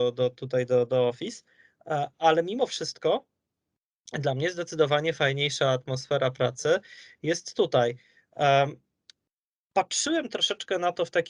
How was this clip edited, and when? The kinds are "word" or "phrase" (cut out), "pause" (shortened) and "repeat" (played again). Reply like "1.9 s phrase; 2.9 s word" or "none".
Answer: none